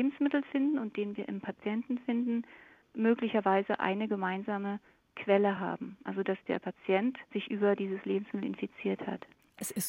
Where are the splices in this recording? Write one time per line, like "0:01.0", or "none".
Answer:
none